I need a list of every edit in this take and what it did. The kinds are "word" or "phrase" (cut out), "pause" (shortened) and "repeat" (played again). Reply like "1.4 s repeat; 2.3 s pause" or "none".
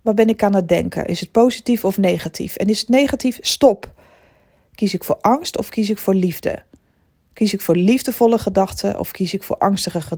none